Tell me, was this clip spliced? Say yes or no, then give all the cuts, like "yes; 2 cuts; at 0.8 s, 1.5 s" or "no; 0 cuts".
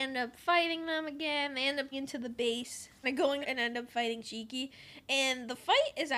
yes; 3 cuts; at 1.9 s, 3.0 s, 3.4 s